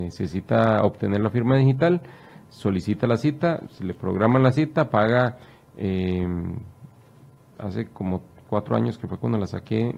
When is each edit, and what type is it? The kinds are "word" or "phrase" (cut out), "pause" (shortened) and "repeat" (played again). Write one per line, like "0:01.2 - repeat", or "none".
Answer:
none